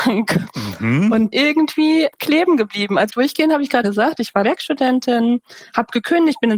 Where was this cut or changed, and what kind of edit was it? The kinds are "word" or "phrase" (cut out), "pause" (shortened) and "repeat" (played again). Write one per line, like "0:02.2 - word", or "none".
0:01.3 - word
0:02.1 - word
0:03.1 - word
0:03.8 - word
0:04.4 - word